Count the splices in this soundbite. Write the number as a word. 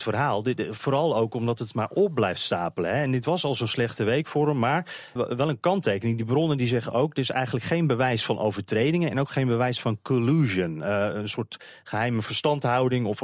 one